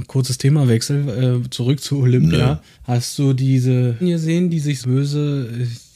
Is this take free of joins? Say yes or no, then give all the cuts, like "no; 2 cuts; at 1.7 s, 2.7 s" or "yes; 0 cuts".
no; 3 cuts; at 2.7 s, 4.0 s, 4.8 s